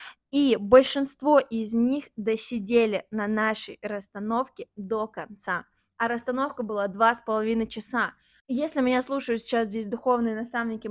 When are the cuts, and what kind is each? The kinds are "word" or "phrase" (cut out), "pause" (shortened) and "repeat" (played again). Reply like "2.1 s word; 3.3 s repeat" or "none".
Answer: none